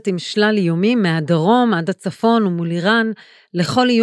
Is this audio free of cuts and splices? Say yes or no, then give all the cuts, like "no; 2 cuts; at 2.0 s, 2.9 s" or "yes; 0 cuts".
yes; 0 cuts